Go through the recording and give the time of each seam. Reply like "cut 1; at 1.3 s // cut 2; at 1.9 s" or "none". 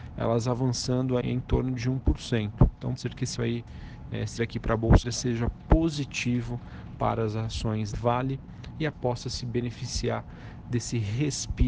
cut 1; at 1.2 s // cut 2; at 3.0 s // cut 3; at 3.4 s // cut 4; at 4.4 s // cut 5; at 5.0 s // cut 6; at 7.9 s // cut 7; at 8.9 s